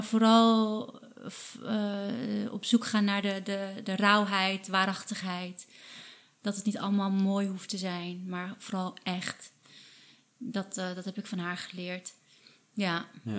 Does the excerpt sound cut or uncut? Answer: uncut